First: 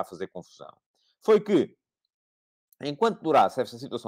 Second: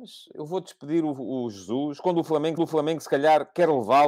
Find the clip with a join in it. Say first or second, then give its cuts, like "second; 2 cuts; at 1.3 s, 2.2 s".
second; 1 cut; at 2.6 s